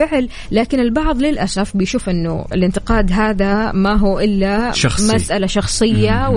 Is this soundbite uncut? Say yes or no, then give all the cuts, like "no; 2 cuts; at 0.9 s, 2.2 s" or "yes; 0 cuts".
yes; 0 cuts